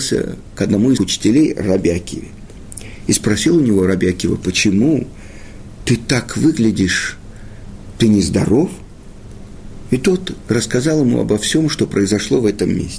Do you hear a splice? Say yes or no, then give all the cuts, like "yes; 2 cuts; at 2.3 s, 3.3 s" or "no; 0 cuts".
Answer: yes; 1 cut; at 1.0 s